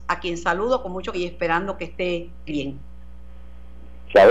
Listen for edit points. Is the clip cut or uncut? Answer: cut